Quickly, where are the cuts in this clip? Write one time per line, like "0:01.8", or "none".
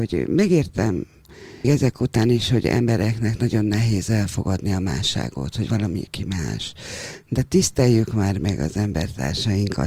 0:01.6